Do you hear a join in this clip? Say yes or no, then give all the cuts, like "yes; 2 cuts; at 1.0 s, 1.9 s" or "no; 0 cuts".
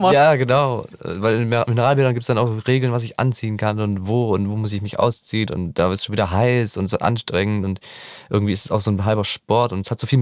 yes; 1 cut; at 5.5 s